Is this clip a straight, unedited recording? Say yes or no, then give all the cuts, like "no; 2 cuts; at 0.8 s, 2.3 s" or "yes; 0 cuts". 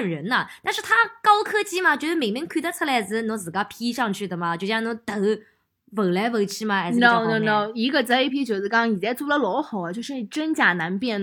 no; 1 cut; at 8.3 s